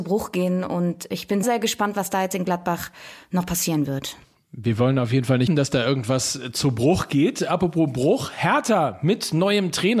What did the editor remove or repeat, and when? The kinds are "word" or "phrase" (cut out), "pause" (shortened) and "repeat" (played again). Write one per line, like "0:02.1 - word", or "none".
0:01.4 - word
0:04.2 - pause
0:05.5 - word